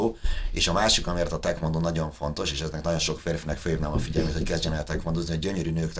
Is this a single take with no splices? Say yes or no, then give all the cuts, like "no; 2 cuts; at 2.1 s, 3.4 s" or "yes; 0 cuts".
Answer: yes; 0 cuts